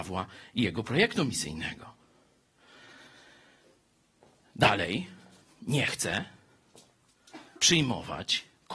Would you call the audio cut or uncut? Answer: cut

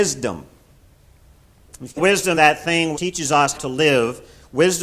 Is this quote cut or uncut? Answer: cut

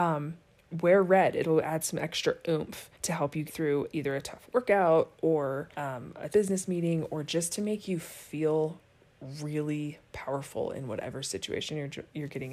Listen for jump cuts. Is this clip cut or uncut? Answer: cut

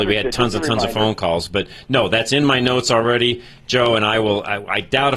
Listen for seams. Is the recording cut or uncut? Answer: uncut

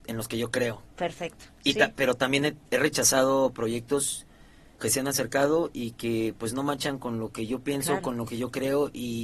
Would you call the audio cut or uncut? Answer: cut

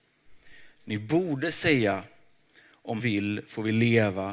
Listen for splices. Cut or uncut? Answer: cut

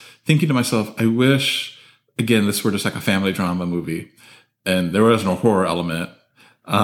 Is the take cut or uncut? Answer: uncut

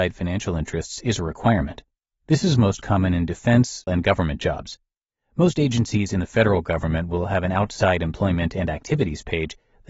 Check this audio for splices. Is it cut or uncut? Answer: cut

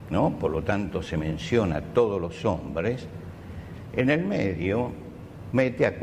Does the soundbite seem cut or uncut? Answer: uncut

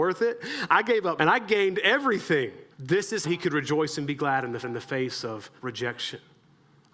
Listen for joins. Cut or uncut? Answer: cut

